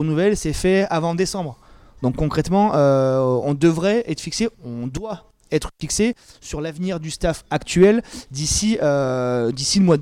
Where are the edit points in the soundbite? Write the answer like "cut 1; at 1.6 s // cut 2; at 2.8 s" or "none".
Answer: cut 1; at 4.5 s